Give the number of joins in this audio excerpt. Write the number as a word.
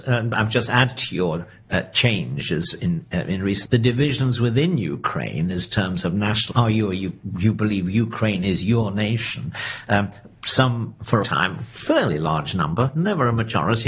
three